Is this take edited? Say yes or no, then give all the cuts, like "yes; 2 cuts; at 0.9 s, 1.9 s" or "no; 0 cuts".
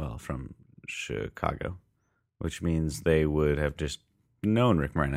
no; 0 cuts